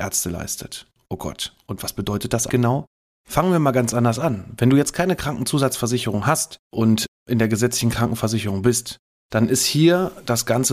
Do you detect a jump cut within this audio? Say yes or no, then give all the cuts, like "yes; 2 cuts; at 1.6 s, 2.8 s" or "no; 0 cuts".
yes; 2 cuts; at 2.5 s, 6.6 s